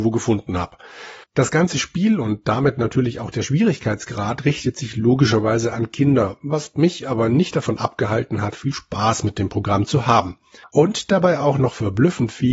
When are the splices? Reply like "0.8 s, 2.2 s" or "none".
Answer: 1.2 s, 10.6 s